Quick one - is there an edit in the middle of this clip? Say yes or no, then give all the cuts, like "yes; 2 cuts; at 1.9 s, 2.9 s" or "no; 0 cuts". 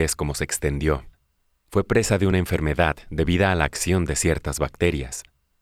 no; 0 cuts